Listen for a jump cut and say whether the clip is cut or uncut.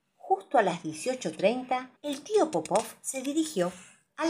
cut